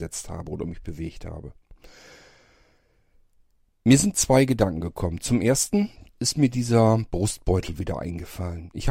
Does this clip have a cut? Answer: no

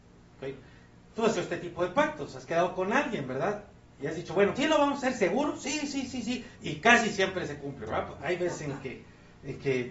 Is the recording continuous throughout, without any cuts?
no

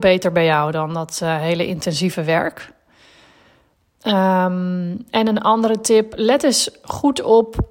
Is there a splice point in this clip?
no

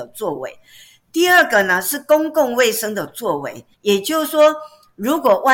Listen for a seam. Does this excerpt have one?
yes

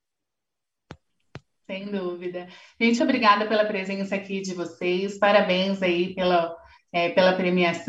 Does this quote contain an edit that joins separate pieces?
yes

